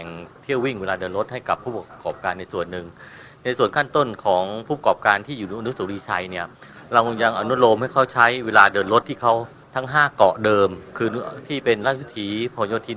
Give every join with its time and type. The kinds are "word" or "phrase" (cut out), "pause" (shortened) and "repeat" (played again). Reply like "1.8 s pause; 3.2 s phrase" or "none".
9.6 s pause